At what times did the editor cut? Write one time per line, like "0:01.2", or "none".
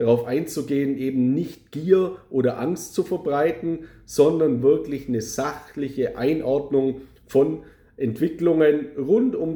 none